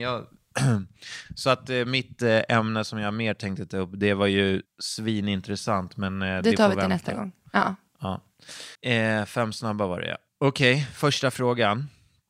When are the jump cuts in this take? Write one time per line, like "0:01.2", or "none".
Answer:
0:08.7
0:10.3